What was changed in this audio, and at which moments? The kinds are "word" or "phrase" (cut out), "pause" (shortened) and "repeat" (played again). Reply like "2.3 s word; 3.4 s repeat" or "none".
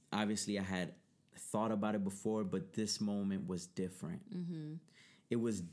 none